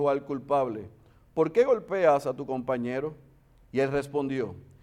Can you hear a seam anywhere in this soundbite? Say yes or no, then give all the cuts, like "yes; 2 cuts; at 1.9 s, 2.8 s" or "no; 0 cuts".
no; 0 cuts